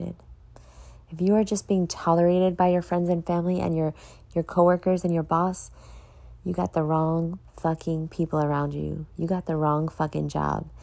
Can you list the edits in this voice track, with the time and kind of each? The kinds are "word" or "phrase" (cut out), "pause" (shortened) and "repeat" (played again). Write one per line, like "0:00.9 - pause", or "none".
none